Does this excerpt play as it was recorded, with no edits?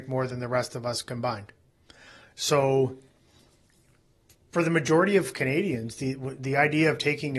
yes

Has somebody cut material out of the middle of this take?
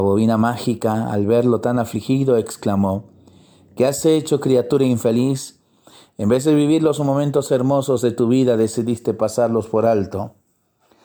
no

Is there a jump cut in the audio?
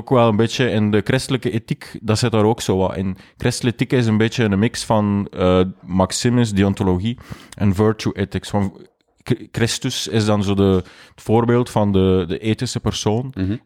no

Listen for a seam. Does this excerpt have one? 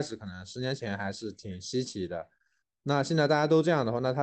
no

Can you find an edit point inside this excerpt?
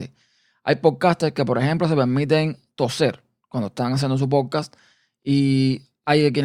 no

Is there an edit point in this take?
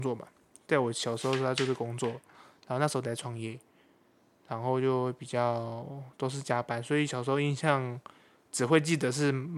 no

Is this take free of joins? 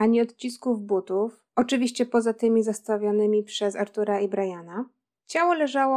yes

